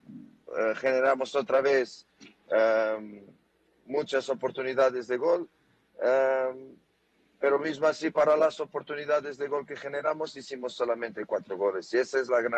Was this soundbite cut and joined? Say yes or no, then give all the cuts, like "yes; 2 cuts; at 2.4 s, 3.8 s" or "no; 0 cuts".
no; 0 cuts